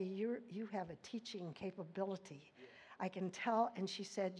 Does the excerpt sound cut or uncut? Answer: uncut